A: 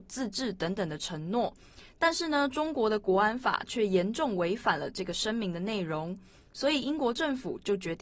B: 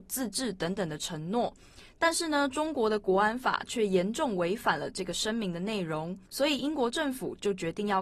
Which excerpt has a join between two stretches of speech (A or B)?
B